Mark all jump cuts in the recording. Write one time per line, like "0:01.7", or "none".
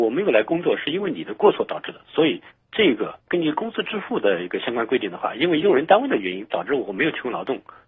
0:02.5
0:03.2